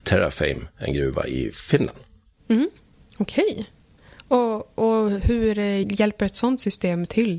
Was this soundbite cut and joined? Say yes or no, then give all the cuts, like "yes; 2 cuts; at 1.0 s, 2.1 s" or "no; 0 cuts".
yes; 2 cuts; at 3.0 s, 5.8 s